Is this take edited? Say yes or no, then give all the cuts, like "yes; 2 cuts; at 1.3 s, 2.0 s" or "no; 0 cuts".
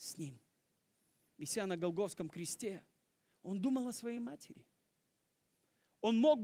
no; 0 cuts